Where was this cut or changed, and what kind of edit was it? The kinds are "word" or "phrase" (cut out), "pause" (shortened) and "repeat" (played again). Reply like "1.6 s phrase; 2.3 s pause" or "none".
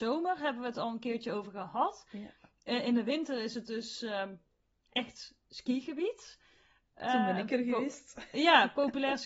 none